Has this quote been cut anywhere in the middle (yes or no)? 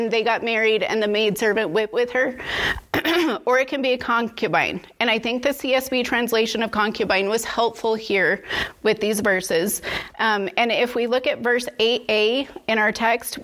no